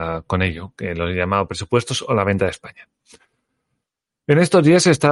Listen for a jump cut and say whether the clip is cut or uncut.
uncut